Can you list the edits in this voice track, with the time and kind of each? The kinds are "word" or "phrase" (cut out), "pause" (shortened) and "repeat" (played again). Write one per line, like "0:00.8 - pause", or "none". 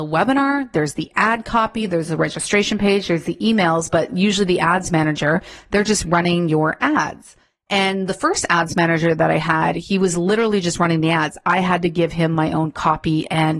none